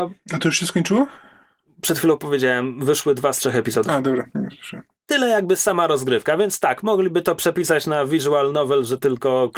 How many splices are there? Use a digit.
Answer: 0